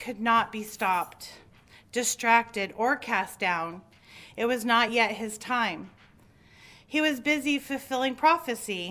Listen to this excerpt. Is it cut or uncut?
uncut